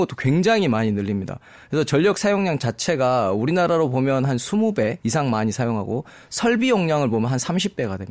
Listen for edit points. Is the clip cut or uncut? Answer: cut